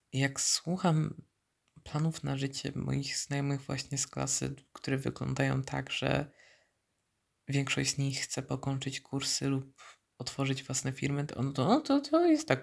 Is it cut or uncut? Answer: uncut